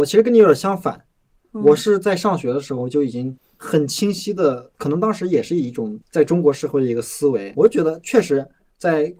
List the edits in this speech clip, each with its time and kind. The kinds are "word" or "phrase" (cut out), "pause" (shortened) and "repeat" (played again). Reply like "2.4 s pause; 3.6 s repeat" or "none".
4.7 s pause; 6.0 s pause; 7.6 s word